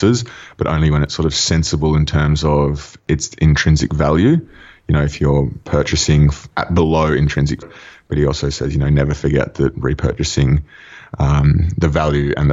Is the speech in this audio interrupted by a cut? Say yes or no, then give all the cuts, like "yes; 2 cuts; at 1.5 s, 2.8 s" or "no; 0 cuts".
yes; 2 cuts; at 6.5 s, 7.6 s